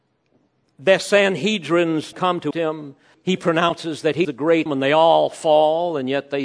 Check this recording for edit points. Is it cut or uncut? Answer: cut